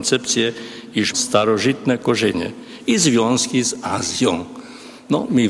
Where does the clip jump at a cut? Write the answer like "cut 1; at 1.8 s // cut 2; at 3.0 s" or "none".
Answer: cut 1; at 1.1 s